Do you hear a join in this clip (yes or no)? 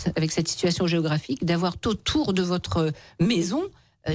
yes